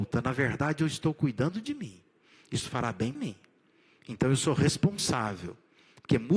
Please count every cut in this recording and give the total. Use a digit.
1